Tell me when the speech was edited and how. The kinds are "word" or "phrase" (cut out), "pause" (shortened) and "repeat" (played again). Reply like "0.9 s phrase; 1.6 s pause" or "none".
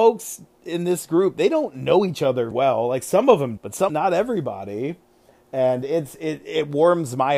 2.5 s word; 3.6 s word; 3.9 s word